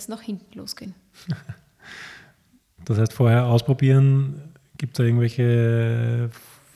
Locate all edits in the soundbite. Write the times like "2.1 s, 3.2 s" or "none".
none